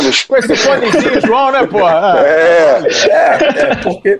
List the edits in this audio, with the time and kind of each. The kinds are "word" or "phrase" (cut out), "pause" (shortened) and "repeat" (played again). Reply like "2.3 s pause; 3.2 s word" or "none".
none